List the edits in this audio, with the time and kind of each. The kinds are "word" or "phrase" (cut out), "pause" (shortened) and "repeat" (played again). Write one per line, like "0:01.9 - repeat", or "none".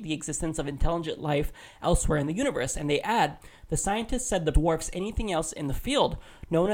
0:04.5 - word